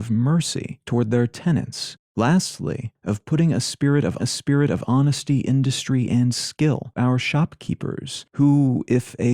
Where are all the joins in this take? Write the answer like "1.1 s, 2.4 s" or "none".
4.2 s, 7.0 s

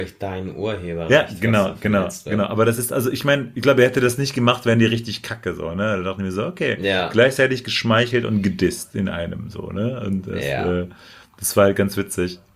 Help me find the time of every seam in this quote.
none

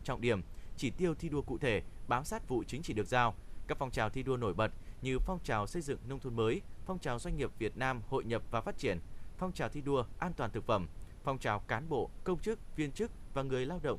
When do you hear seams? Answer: 2.5 s

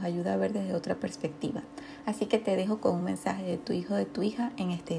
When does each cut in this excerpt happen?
none

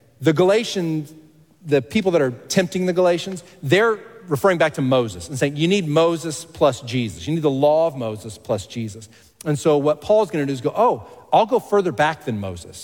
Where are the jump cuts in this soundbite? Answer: none

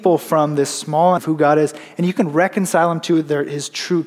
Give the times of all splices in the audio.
1.2 s

